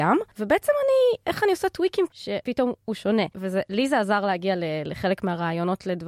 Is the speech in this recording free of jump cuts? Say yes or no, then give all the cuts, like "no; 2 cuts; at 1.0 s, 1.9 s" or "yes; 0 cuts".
no; 1 cut; at 2.1 s